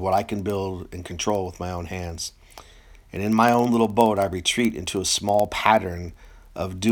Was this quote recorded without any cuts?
yes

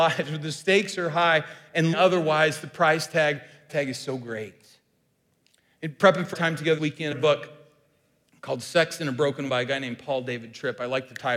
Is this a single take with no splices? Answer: no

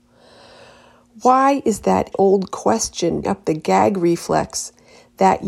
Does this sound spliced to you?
yes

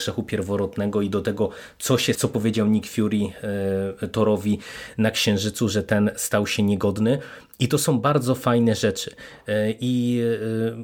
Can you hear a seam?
yes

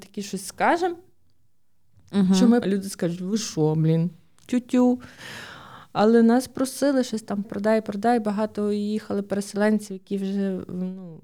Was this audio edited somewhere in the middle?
yes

